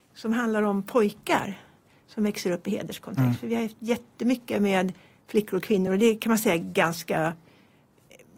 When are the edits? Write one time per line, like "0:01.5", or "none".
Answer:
none